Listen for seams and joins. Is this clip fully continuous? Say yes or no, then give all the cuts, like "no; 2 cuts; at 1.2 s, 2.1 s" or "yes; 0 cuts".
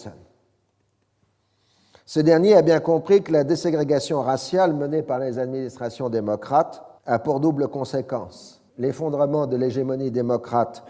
no; 2 cuts; at 7.0 s, 8.7 s